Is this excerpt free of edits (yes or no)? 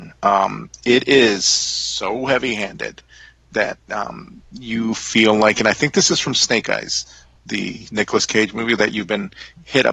yes